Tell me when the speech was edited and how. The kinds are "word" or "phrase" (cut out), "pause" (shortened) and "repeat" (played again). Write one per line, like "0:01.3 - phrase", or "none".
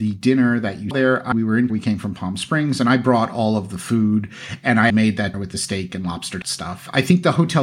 0:00.9 - word
0:01.3 - word
0:01.7 - word
0:04.9 - word
0:05.3 - word
0:06.4 - phrase